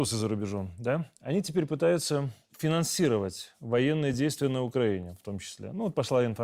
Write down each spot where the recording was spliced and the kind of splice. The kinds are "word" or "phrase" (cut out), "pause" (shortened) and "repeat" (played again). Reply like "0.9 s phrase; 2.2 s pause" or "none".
none